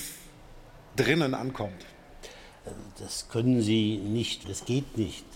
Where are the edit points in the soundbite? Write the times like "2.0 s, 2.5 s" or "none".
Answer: 3.3 s, 4.4 s